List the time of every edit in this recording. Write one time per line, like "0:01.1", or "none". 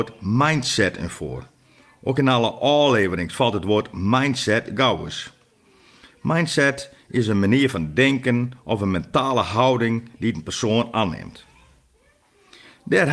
none